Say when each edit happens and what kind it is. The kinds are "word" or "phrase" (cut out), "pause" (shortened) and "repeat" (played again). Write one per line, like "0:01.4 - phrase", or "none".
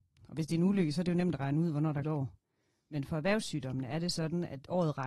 0:02.0 - word